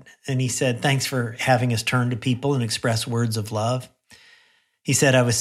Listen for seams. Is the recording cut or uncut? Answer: uncut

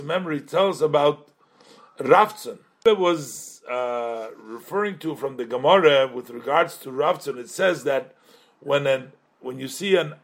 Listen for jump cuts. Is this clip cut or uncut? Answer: uncut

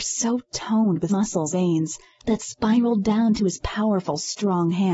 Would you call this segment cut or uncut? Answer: cut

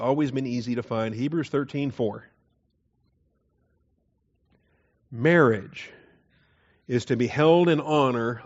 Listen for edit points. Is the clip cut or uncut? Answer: uncut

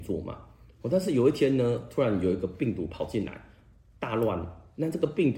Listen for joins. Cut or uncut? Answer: uncut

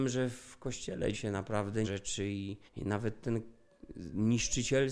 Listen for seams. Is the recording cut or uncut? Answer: cut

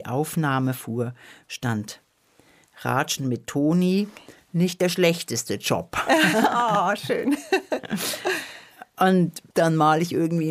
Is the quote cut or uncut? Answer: uncut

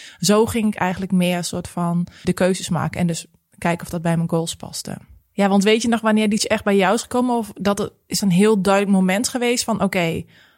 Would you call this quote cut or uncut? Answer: cut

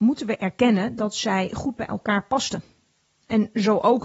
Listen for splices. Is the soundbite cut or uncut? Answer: uncut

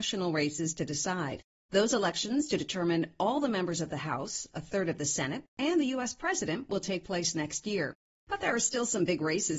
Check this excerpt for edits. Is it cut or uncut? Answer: uncut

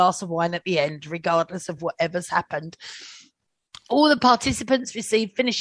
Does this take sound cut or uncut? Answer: uncut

